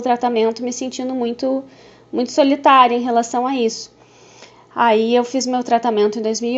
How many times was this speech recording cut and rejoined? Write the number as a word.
zero